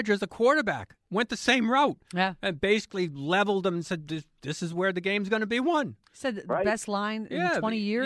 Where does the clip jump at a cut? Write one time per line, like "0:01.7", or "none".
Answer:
none